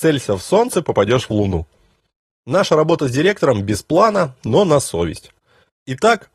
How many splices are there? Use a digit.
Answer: 0